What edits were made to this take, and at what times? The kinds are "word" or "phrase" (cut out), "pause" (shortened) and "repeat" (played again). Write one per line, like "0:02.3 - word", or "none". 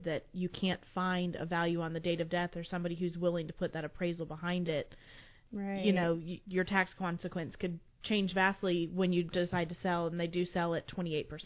none

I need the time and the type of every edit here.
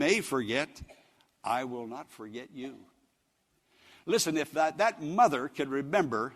none

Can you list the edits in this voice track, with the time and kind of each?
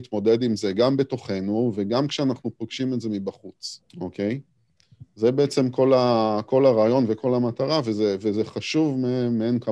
0:03.9 - pause

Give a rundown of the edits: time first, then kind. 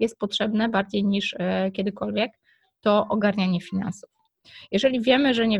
none

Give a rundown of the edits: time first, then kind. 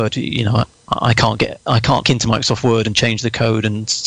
0:02.0 - word

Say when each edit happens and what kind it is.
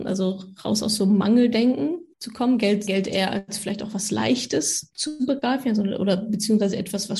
0:02.1 - pause
0:02.9 - word

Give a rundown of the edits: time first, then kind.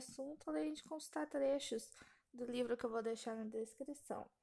none

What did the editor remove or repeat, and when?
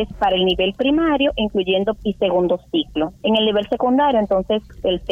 0:02.0 - word
0:03.2 - pause

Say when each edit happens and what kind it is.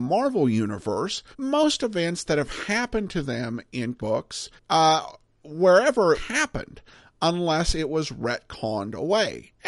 0:01.3 - pause
0:04.0 - word
0:04.6 - pause
0:06.1 - phrase

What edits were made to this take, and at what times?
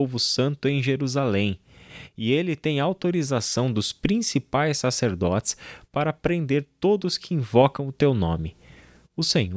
none

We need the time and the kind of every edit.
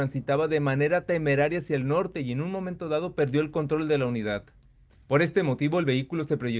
none

